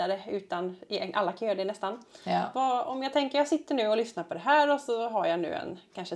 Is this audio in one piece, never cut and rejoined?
yes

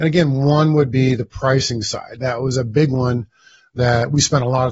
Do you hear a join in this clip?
no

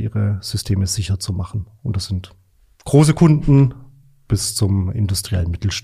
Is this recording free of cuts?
yes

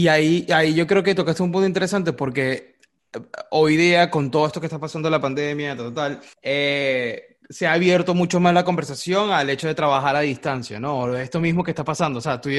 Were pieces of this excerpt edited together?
yes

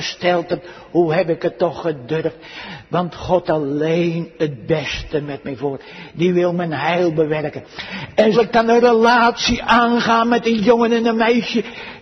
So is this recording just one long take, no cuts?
no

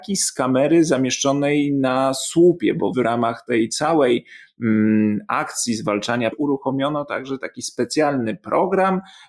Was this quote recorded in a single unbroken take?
no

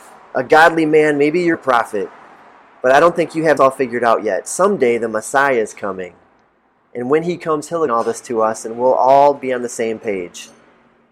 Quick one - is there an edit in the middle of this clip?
yes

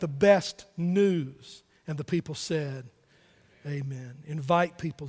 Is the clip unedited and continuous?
yes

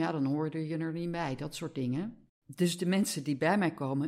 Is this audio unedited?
no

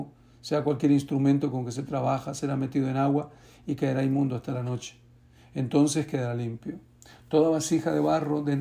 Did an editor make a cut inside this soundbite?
no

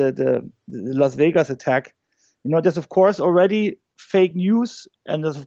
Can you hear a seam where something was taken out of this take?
no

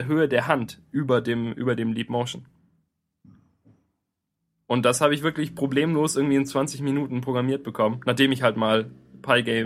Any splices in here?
no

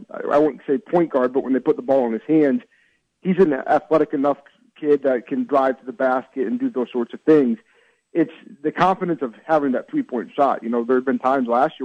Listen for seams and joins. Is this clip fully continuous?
yes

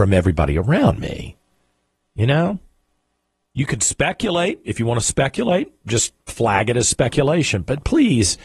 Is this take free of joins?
yes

